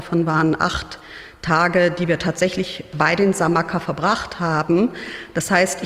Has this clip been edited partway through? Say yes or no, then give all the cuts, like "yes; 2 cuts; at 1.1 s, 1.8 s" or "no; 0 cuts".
no; 0 cuts